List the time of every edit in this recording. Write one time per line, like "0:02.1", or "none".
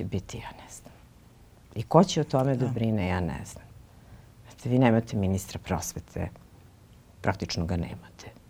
none